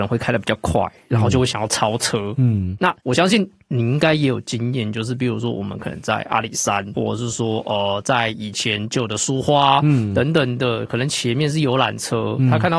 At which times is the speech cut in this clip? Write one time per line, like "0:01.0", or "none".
0:06.9